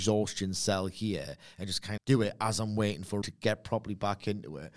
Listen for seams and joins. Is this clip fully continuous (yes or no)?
no